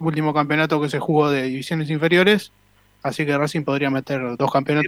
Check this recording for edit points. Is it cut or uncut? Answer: uncut